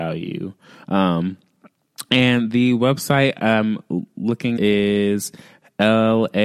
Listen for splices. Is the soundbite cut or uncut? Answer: cut